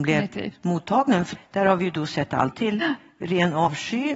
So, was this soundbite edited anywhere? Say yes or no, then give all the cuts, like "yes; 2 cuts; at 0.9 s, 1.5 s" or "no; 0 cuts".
yes; 2 cuts; at 1.4 s, 2.5 s